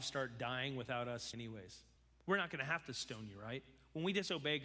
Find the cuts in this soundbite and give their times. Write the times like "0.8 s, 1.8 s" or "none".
1.3 s, 2.0 s